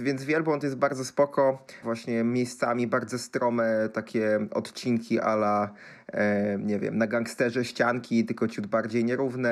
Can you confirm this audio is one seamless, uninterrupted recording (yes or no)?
no